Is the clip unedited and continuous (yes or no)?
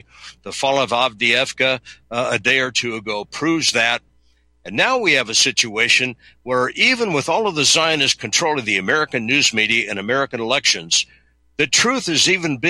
yes